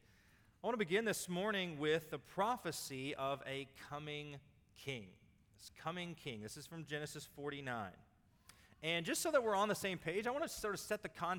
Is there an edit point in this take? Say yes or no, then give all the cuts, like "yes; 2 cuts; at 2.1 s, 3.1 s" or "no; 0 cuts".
no; 0 cuts